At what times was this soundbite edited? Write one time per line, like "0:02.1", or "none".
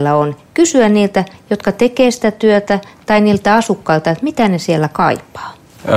none